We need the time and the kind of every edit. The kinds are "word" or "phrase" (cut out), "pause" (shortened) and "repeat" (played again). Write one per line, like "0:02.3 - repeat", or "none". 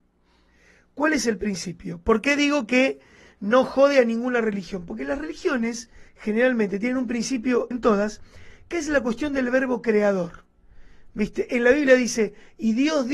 0:06.1 - pause
0:07.7 - word